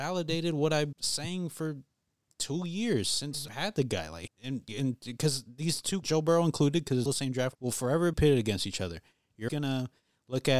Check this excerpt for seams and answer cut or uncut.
cut